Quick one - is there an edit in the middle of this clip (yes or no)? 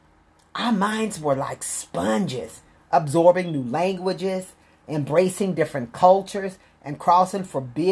no